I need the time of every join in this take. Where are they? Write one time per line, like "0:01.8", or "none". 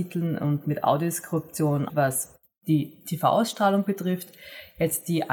0:01.9
0:02.4

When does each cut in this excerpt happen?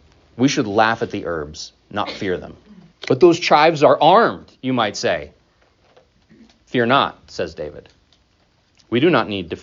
0:02.9

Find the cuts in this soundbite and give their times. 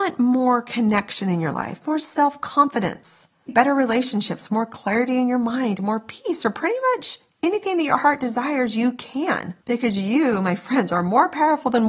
0:03.5
0:09.6

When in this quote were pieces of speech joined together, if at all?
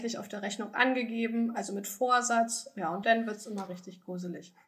0:03.0

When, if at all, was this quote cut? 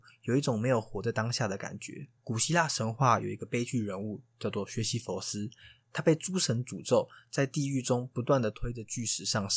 0:02.2

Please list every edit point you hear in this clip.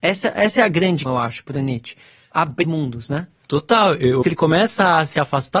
0:01.1
0:02.6
0:04.2

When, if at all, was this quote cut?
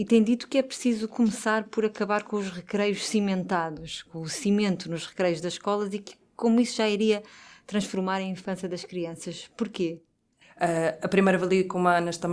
none

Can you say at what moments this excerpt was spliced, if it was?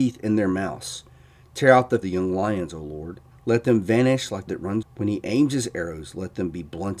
0:02.0
0:03.3
0:04.5
0:04.8

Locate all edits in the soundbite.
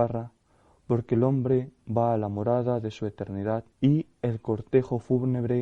0:03.7

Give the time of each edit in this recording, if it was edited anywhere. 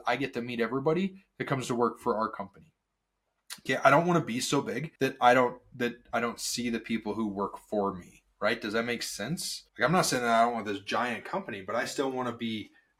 0:05.0
0:09.7

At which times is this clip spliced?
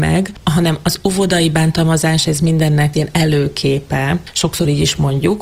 0:02.9

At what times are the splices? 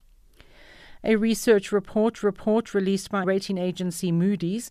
0:02.2
0:03.2

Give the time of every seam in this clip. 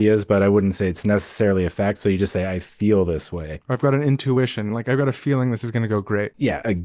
none

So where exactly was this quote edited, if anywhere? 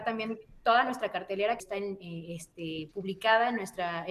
0:01.6
0:02.9

